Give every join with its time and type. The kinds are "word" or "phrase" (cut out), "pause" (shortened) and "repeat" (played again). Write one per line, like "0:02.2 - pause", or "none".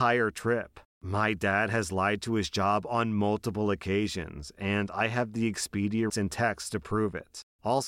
0:06.1 - word